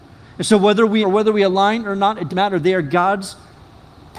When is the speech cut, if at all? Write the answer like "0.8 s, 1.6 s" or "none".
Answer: 1.0 s, 2.3 s